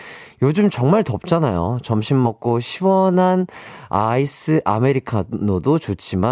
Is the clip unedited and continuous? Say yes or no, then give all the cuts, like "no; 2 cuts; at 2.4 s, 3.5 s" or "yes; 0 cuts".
yes; 0 cuts